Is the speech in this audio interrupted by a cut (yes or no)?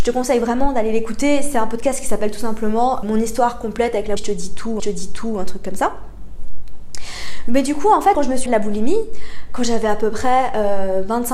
yes